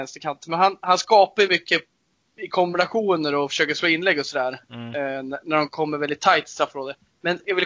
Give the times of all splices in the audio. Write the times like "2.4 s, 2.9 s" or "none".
none